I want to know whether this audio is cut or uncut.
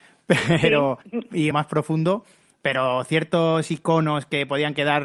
cut